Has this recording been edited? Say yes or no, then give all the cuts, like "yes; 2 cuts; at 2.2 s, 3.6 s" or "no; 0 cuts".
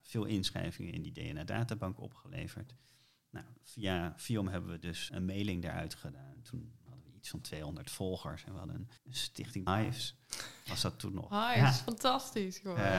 yes; 3 cuts; at 5.1 s, 9.0 s, 9.7 s